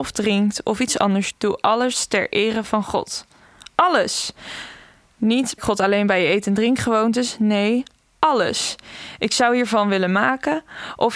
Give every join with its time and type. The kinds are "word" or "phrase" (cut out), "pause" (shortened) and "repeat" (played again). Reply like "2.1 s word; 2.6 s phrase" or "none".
1.3 s word; 5.6 s word